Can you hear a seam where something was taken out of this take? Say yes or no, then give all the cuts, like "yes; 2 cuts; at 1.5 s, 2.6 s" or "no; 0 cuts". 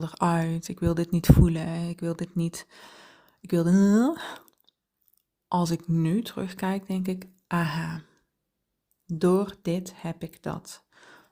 no; 0 cuts